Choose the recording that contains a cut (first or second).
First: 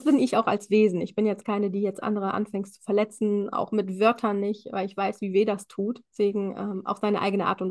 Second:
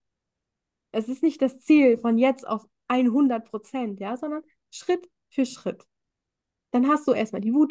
first